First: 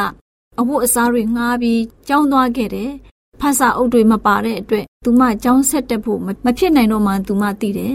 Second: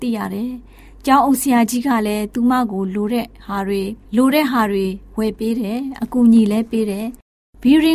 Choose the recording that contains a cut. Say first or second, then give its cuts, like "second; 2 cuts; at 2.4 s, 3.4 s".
second; 1 cut; at 4.0 s